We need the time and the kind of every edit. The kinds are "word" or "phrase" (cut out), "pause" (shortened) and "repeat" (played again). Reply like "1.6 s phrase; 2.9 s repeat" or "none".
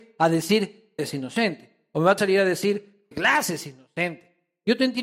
1.0 s word; 2.2 s word; 3.1 s word